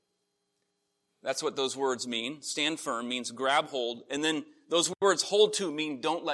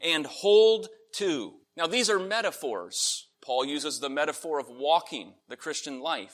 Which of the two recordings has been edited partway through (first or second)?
second